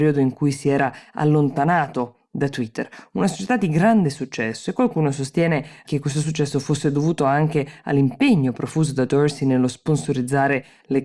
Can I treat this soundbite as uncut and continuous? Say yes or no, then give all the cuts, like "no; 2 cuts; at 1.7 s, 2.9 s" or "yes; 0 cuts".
yes; 0 cuts